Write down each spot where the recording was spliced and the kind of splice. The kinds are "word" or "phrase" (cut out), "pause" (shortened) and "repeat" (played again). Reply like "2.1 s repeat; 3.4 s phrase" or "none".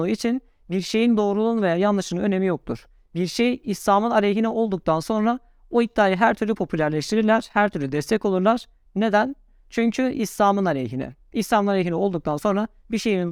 none